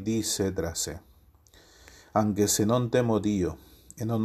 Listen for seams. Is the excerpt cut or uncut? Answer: uncut